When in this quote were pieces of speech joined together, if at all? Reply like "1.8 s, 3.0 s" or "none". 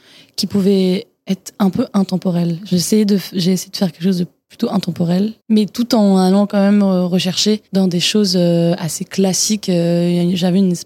5.4 s, 7.7 s